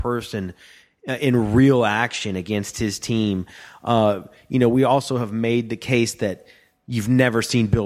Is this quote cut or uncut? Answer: uncut